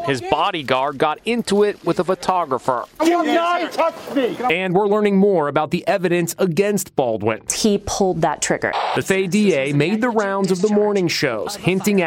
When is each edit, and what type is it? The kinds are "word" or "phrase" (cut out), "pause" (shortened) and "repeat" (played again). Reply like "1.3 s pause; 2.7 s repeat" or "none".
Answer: 9.0 s word

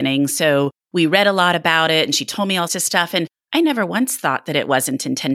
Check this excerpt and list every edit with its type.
2.7 s word

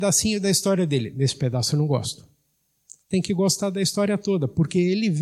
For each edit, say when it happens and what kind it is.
none

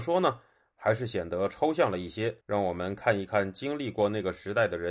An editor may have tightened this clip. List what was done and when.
2.4 s pause

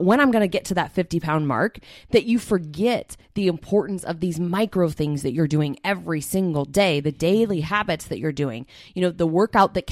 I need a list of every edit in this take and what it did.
none

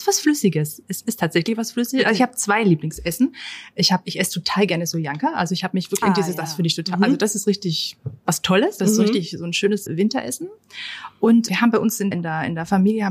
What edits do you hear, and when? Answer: 6.0 s word; 9.9 s word; 11.5 s word; 12.1 s word

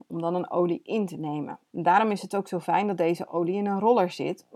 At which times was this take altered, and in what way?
1.7 s pause

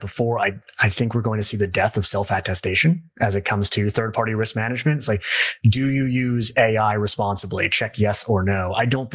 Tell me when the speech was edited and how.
none

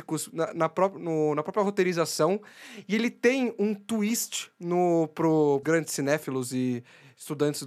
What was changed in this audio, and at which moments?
5.6 s word

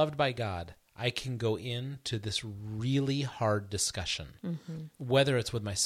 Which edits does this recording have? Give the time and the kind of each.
none

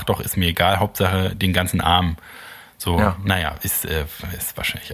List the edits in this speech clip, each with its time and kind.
none

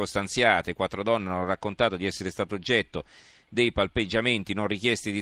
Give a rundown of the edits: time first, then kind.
none

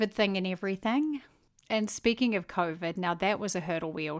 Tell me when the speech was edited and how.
none

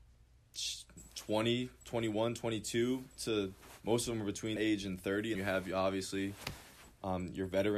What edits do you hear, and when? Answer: 3.2 s word; 4.6 s word; 5.3 s word

